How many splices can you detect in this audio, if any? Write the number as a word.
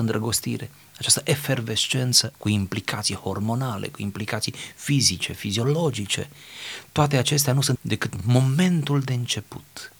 two